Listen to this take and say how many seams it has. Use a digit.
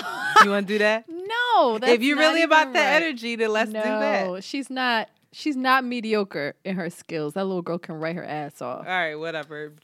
0